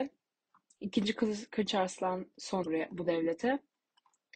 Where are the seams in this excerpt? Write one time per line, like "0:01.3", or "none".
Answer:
0:02.6